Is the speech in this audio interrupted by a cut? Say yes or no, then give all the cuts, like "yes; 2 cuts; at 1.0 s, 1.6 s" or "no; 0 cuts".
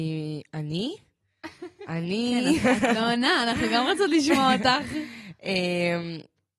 no; 0 cuts